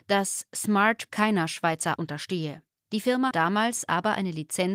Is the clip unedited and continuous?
no; 4 cuts; at 1.1 s, 2.0 s, 2.7 s, 3.3 s

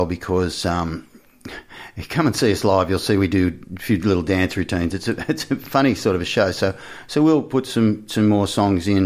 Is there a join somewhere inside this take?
no; 0 cuts

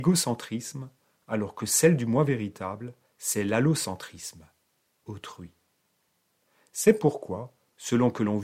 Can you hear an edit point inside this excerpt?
yes; 1 cut; at 5.1 s

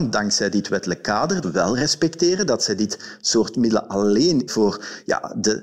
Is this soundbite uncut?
no; 2 cuts; at 1.4 s, 4.5 s

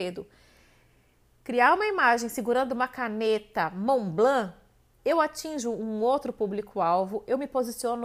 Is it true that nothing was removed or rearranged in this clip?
yes; 0 cuts

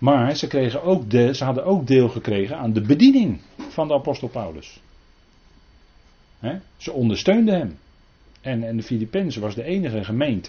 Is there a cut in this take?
no; 0 cuts

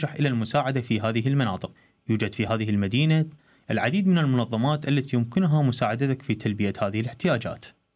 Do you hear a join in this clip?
no; 0 cuts

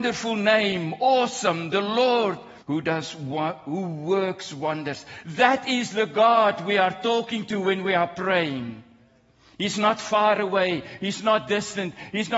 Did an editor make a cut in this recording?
yes; 1 cut; at 2.6 s

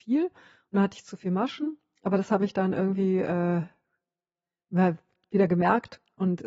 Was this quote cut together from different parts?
no; 0 cuts

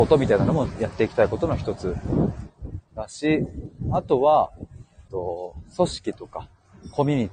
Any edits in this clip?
yes; 1 cut; at 5.1 s

